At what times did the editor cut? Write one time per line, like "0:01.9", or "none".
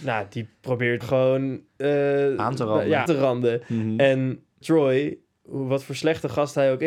0:01.0
0:01.7
0:03.1
0:04.6